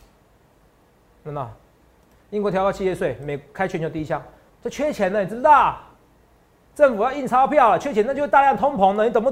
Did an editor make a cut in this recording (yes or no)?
no